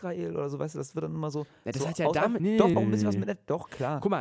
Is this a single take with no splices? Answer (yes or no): no